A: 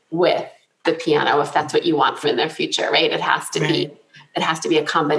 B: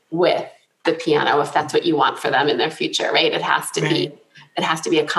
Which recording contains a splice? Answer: A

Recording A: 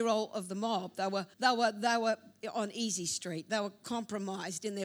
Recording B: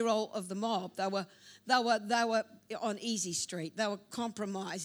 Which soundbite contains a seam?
A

